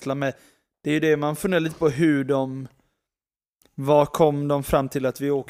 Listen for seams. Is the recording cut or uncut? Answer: uncut